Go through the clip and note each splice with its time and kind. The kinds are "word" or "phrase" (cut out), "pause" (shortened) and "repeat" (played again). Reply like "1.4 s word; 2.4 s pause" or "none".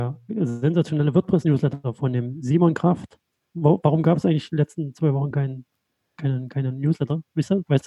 none